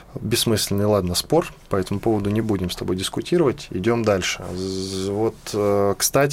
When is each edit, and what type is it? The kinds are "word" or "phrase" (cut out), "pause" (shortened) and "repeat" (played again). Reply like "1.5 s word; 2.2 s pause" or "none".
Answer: none

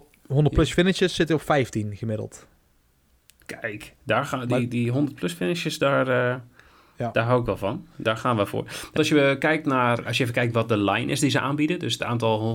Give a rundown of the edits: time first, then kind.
9.0 s word; 10.1 s word

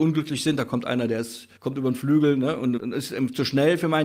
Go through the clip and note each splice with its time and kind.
1.6 s pause; 2.8 s word

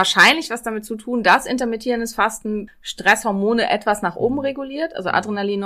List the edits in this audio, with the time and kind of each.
2.7 s word

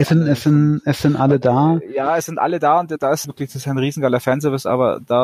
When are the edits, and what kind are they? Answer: 3.2 s phrase

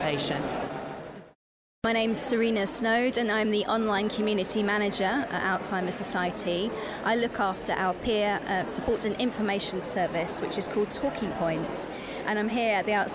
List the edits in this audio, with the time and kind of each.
none

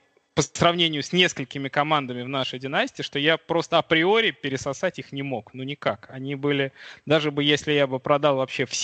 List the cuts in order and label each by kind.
none

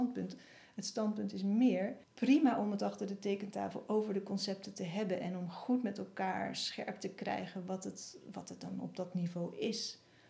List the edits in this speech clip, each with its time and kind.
2.0 s pause

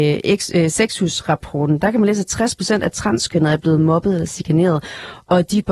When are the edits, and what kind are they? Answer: none

